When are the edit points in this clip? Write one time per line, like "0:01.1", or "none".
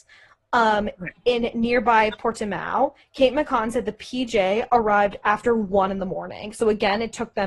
none